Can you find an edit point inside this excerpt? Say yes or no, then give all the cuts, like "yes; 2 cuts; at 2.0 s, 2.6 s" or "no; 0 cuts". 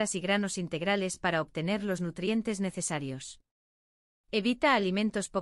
no; 0 cuts